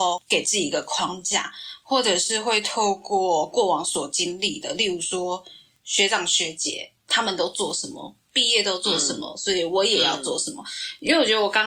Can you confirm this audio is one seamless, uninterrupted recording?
yes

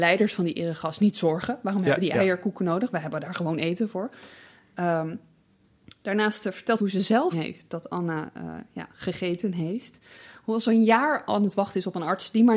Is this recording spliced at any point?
yes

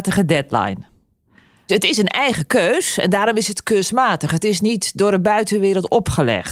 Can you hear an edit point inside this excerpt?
no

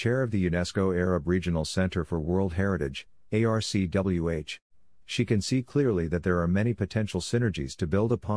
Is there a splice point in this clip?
no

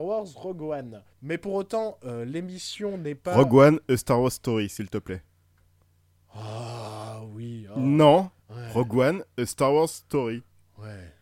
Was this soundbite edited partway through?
yes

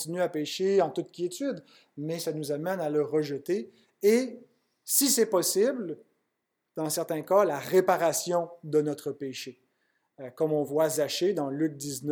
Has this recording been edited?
no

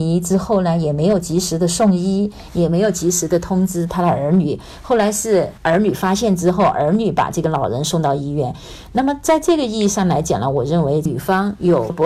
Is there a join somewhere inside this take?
yes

